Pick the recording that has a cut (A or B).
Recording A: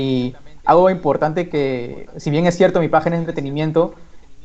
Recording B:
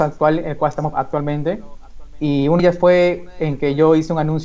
B